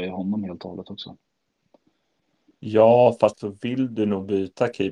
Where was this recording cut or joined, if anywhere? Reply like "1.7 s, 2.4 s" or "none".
3.3 s

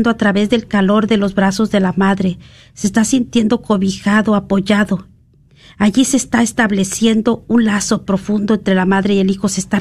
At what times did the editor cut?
none

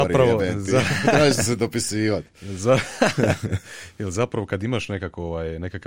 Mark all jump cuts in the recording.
none

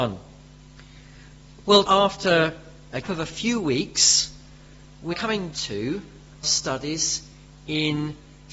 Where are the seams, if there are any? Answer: 1.8 s, 3.0 s, 5.1 s, 5.5 s, 6.4 s

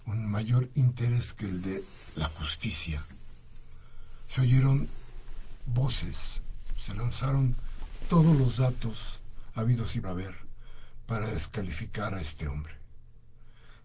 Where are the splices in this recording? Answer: 10.0 s

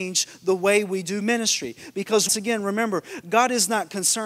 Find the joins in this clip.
2.3 s

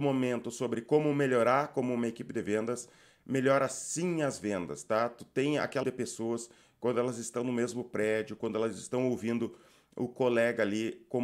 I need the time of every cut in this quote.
5.8 s

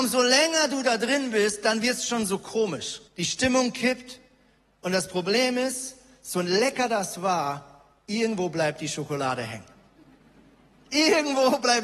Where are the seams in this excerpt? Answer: 3.1 s

